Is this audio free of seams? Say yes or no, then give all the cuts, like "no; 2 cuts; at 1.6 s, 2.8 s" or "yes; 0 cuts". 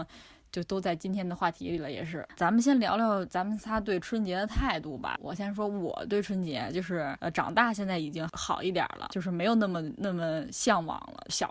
no; 1 cut; at 2.4 s